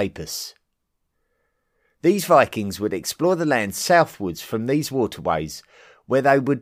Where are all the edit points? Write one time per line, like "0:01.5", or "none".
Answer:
none

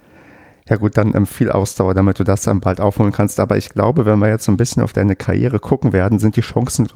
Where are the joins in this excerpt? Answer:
none

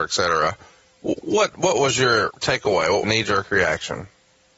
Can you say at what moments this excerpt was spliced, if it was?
0:03.0

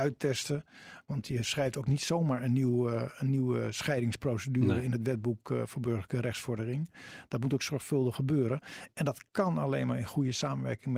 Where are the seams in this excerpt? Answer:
none

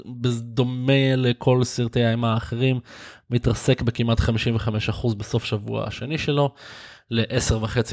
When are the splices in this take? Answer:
none

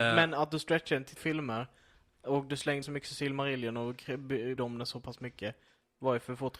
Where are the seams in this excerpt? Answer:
0:01.2
0:02.8
0:04.6

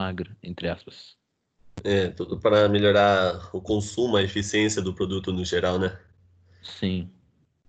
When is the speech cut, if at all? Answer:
none

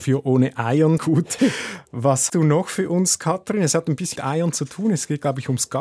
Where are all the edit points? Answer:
0:01.0
0:02.3
0:04.2

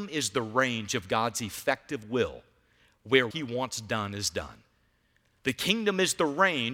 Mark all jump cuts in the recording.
0:03.3

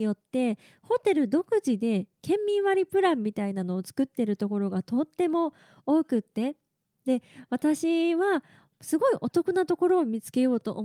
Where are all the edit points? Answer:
none

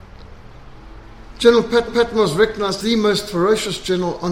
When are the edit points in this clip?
0:01.9
0:02.8

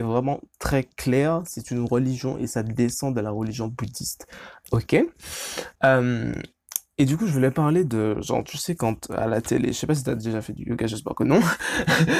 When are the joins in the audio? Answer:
0:05.8

